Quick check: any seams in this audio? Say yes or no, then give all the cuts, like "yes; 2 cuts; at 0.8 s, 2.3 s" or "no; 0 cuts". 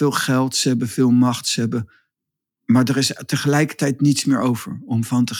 no; 0 cuts